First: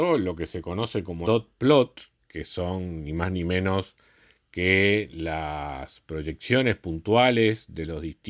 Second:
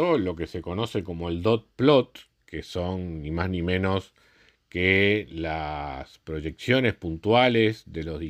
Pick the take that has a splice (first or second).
first